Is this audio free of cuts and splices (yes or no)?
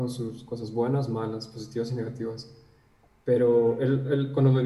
yes